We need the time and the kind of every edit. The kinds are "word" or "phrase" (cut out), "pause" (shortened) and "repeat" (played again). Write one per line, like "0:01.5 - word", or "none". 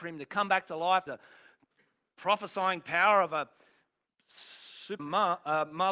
0:01.1 - word
0:05.0 - word